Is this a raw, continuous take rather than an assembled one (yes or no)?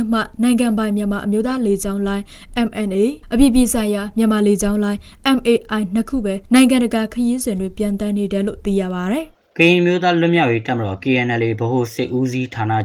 no